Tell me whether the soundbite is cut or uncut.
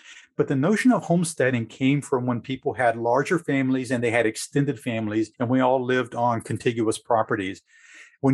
cut